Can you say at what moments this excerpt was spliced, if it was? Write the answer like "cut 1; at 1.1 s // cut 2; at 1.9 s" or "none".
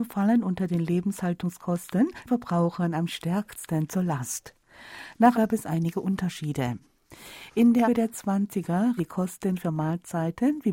cut 1; at 2.3 s // cut 2; at 5.3 s // cut 3; at 7.8 s // cut 4; at 9.0 s